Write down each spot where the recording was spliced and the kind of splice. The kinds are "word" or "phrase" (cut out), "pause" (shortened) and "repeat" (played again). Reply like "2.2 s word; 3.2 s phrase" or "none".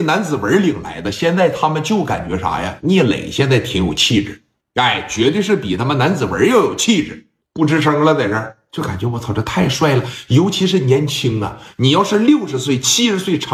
4.6 s pause; 7.4 s pause